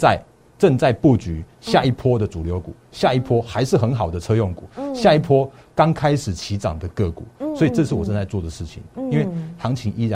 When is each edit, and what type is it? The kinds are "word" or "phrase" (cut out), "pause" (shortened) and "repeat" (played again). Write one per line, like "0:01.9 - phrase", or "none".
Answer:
none